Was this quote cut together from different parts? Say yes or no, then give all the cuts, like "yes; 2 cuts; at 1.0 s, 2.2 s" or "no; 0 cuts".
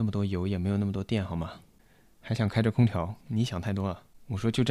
yes; 1 cut; at 3.2 s